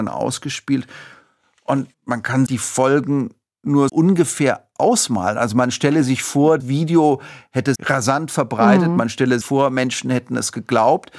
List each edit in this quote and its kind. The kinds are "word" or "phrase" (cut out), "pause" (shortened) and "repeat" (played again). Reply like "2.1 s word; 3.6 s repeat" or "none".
1.9 s pause; 2.5 s word; 3.9 s word; 6.6 s word; 7.7 s word; 9.4 s word

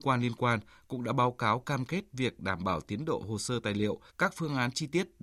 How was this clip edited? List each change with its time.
4.1 s pause

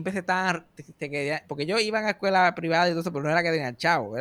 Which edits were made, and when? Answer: none

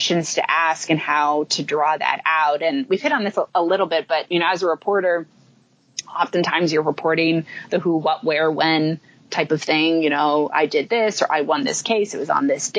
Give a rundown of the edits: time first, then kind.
none

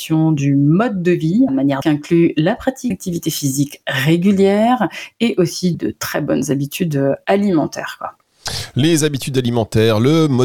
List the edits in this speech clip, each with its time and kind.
1.5 s phrase; 1.8 s phrase; 2.9 s word; 5.7 s word

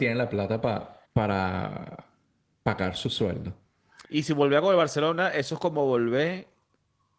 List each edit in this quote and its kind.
1.1 s pause; 4.0 s pause

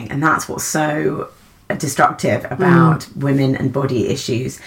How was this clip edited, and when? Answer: none

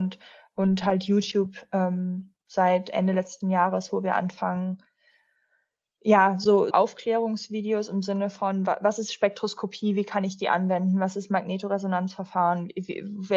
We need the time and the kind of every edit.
6.7 s word

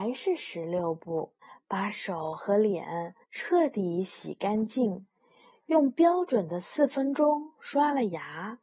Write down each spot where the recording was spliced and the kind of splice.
1.4 s pause; 3.2 s pause

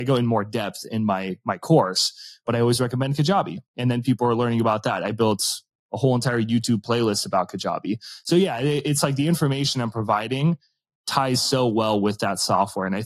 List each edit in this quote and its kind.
none

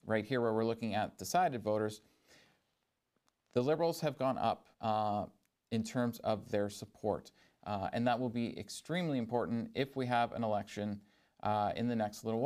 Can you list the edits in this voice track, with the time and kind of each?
4.7 s pause

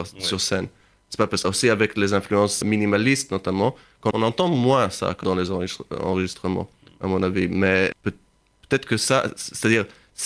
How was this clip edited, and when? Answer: 1.4 s word; 2.6 s word; 4.1 s word; 5.2 s word; 7.9 s word

